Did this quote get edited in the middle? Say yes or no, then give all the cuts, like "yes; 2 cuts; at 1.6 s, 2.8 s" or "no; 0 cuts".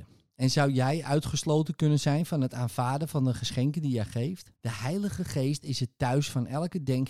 yes; 1 cut; at 4.6 s